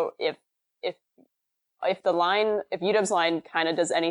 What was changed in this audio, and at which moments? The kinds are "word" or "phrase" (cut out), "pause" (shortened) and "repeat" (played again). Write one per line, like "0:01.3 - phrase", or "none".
none